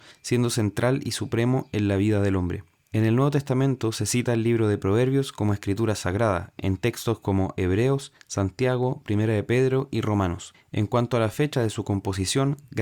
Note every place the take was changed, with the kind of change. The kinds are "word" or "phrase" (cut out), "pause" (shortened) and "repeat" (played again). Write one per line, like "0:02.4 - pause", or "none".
none